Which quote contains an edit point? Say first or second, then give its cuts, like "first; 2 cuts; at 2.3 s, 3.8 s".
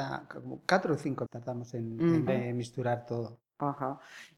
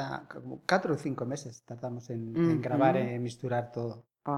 first; 2 cuts; at 1.3 s, 2.3 s